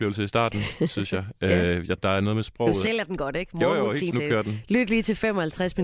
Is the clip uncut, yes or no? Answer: no